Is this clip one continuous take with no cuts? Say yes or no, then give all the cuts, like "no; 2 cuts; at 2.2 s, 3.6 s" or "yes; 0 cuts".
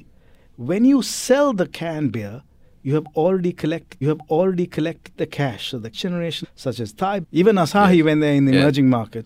no; 4 cuts; at 4.0 s, 5.9 s, 6.4 s, 7.2 s